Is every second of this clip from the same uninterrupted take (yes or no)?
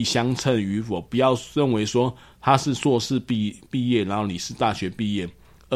yes